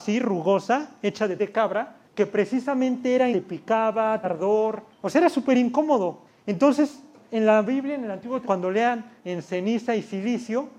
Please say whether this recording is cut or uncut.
cut